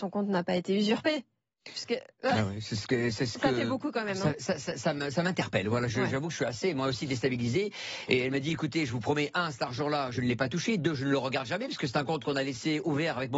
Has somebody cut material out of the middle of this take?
no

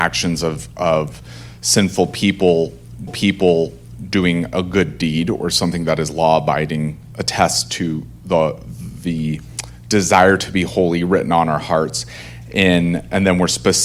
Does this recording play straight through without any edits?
no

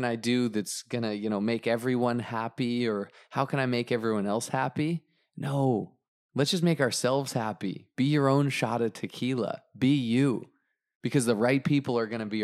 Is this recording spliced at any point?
no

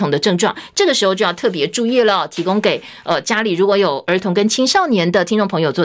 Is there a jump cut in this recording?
no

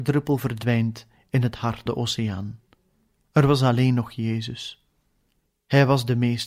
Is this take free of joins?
no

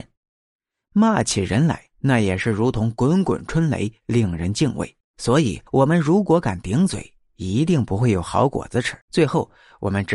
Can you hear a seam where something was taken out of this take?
yes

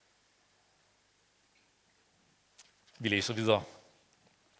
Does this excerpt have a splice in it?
no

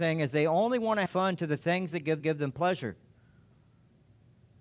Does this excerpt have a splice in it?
yes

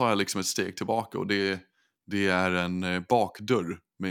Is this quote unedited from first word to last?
yes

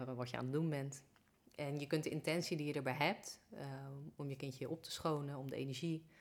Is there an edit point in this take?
no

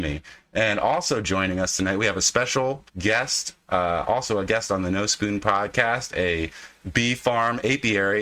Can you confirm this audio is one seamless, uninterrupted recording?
no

